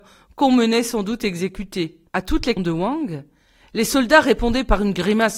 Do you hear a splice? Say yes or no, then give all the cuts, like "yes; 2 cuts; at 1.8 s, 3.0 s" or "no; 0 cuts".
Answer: yes; 2 cuts; at 2.1 s, 2.6 s